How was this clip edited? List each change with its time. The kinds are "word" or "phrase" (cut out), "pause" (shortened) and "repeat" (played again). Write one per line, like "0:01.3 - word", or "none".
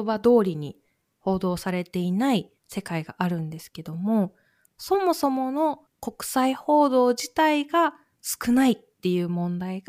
0:02.6 - pause
0:05.9 - pause